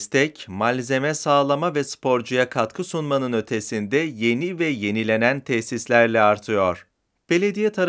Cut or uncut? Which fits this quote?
cut